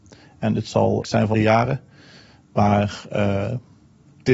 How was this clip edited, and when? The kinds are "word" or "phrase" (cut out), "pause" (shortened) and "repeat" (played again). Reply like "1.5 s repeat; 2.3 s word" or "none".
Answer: 1.0 s phrase; 1.3 s word